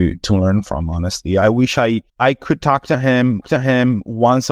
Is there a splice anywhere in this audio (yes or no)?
yes